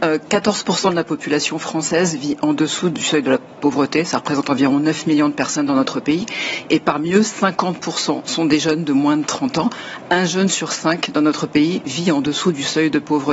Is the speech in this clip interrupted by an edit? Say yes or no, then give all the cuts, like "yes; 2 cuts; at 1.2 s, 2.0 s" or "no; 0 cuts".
no; 0 cuts